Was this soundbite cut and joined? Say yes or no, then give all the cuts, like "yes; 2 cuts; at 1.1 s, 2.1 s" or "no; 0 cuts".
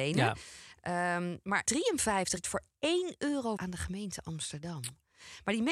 yes; 3 cuts; at 1.7 s, 2.4 s, 3.6 s